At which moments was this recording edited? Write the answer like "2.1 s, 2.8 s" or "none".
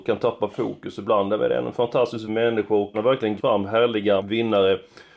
2.3 s, 2.9 s, 3.4 s, 4.2 s

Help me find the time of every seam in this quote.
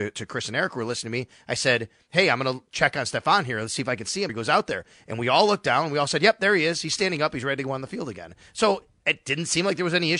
4.3 s

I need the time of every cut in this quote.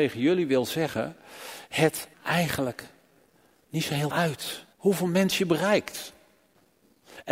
2.1 s, 4.1 s, 4.7 s

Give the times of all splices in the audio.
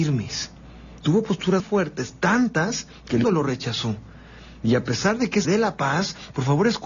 1.6 s, 3.2 s, 5.4 s

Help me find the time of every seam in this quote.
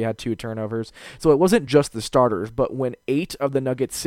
none

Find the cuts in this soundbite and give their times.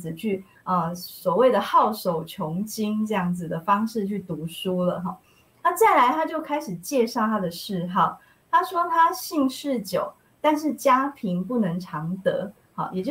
none

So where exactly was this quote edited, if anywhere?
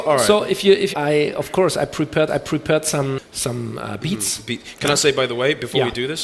0.9 s, 2.3 s

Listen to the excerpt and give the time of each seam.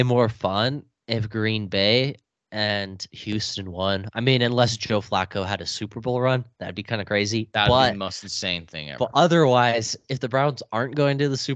none

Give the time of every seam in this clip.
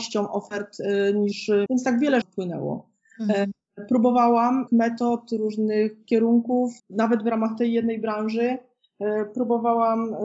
1.7 s, 2.2 s, 4.7 s, 6.8 s

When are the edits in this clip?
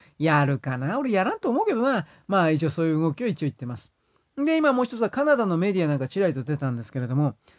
none

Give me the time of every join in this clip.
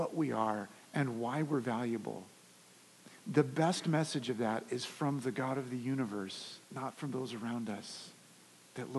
6.6 s

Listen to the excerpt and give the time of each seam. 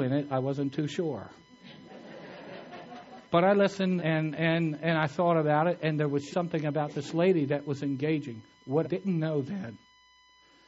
3.2 s, 4.0 s, 6.3 s, 8.8 s

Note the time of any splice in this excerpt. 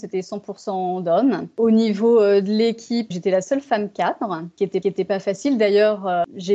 3.1 s, 4.8 s

